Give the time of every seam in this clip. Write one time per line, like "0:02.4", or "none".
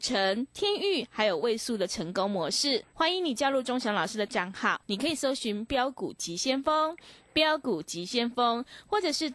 0:02.9
0:04.3
0:04.8